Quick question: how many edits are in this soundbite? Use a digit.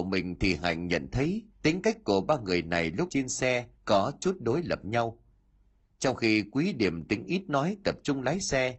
3